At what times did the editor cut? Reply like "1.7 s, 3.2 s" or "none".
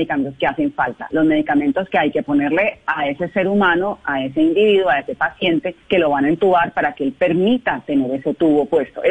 5.8 s